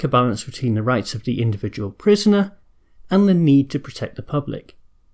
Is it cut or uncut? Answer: uncut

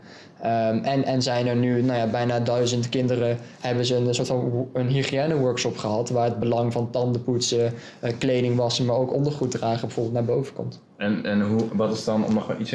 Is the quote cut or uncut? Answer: uncut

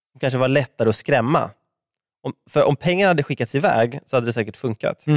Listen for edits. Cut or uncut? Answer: uncut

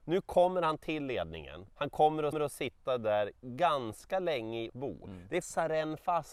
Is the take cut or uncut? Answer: cut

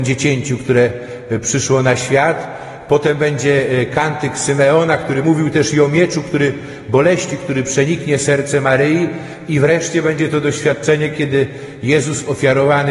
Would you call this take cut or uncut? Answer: cut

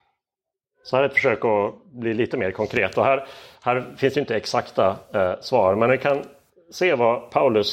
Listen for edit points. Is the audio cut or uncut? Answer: uncut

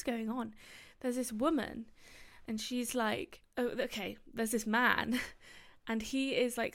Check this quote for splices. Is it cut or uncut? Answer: uncut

